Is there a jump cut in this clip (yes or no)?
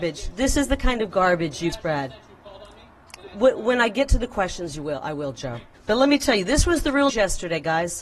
yes